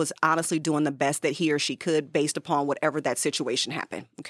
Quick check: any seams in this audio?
no; 0 cuts

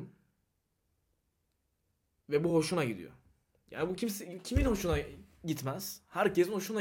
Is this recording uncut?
yes; 0 cuts

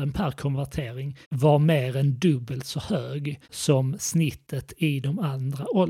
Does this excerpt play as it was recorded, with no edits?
no; 2 cuts; at 1.2 s, 3.4 s

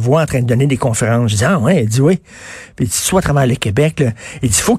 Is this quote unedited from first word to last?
no; 1 cut; at 3.1 s

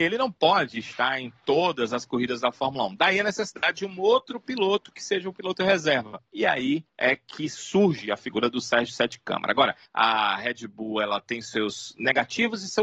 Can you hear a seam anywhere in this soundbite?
yes; 3 cuts; at 6.3 s, 6.9 s, 9.9 s

